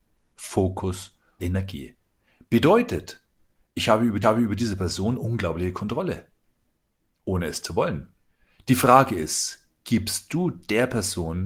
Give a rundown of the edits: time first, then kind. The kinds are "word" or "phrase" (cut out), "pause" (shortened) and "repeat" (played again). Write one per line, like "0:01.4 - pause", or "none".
0:01.4 - word
0:04.2 - repeat
0:08.2 - pause
0:09.8 - pause